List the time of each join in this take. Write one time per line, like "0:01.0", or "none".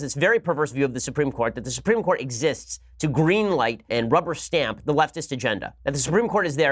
0:03.9
0:05.8

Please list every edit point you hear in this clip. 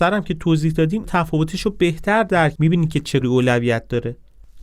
0:01.0
0:02.6
0:03.2

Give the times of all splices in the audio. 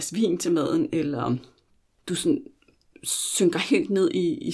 none

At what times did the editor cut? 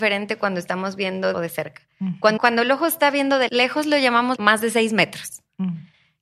0:01.3
0:02.4
0:03.5
0:04.4

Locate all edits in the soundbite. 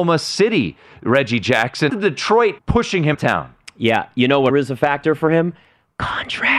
0:01.9
0:02.6
0:03.1
0:04.5

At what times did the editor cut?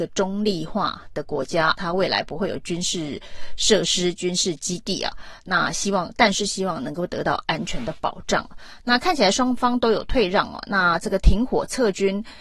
0:01.8

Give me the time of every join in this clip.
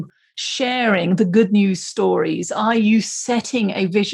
none

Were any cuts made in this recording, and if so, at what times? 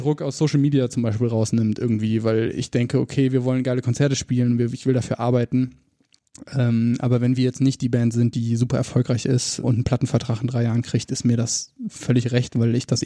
0:09.6

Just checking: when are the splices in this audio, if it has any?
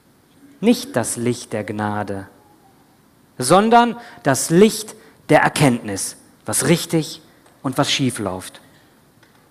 none

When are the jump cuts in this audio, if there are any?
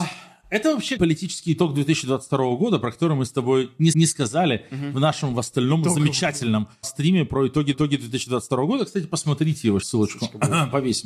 0:01.0
0:03.9
0:06.8
0:07.7
0:09.8

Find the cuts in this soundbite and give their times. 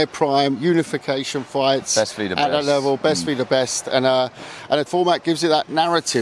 0:04.9

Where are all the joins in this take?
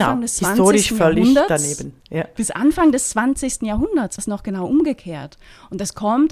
0:02.0
0:04.2

